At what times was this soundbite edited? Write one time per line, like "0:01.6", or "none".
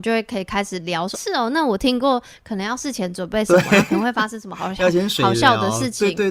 0:01.1